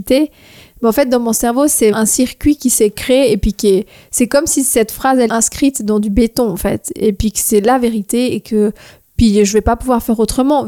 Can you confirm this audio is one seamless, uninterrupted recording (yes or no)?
no